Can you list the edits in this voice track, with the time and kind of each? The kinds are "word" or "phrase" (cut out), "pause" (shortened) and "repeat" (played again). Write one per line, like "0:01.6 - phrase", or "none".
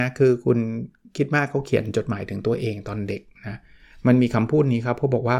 none